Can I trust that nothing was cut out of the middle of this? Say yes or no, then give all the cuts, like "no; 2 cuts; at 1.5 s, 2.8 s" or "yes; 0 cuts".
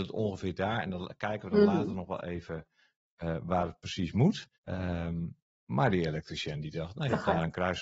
no; 1 cut; at 4.5 s